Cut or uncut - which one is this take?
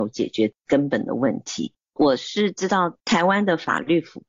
cut